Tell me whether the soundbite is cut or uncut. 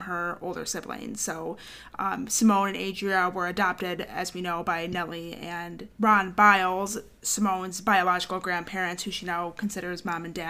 uncut